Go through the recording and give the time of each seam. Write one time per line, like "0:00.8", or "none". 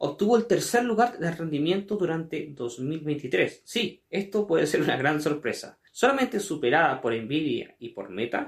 0:04.1
0:05.9

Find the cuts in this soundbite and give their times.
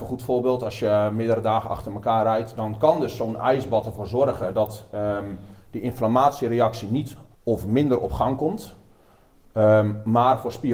0:05.6
0:07.3

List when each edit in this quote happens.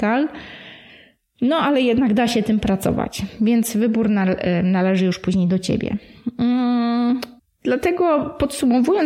0:07.4

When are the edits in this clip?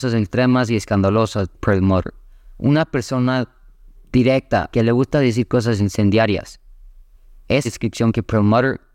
0:01.5
0:04.7
0:07.6

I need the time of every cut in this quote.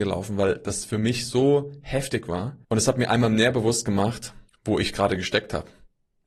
0:02.6
0:04.5

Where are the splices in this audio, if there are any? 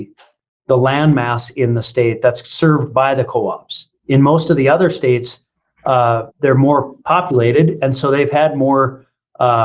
0:04.0
0:06.3
0:07.0

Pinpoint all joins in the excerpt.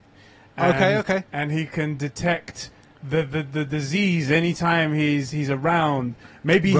none

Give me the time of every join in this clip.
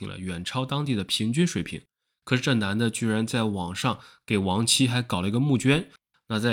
none

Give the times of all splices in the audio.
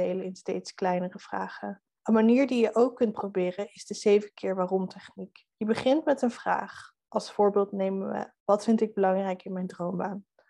0:02.0
0:05.5
0:08.4

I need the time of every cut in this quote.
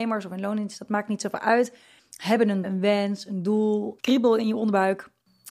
0:02.0
0:02.6
0:04.0

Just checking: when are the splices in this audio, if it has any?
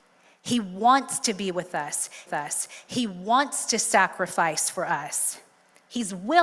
0:02.3

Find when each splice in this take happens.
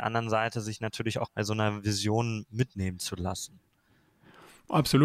0:01.3

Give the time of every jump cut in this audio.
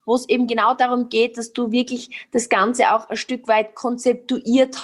none

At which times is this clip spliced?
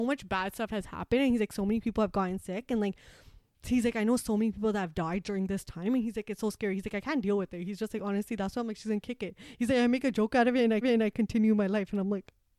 0:10.8

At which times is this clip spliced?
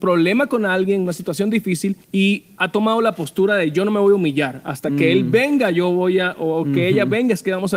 0:02.0

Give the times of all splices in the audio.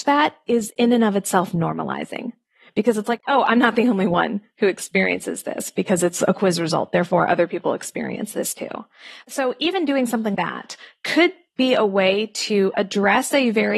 0:10.3

